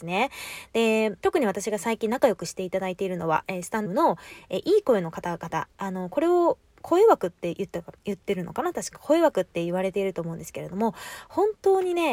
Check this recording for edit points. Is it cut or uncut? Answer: cut